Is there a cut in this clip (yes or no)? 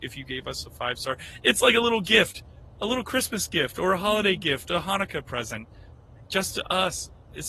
no